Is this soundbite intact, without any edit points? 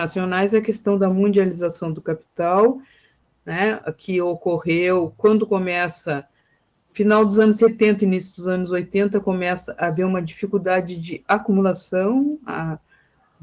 yes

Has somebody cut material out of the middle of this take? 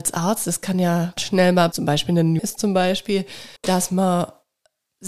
yes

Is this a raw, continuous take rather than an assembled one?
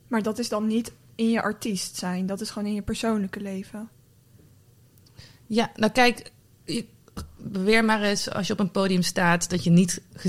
yes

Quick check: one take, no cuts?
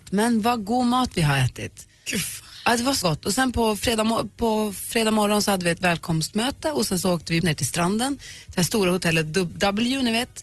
no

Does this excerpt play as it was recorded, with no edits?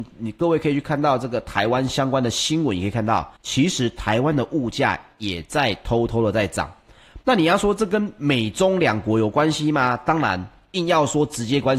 no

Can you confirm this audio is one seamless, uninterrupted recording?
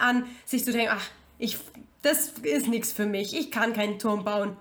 yes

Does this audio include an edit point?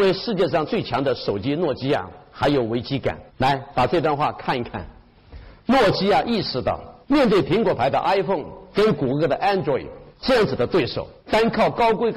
yes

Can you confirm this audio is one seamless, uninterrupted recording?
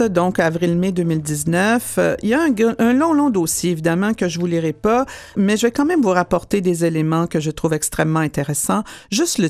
no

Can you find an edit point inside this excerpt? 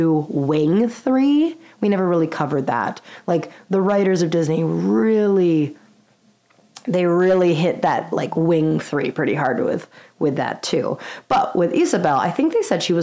no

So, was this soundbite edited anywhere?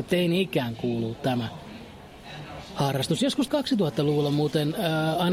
yes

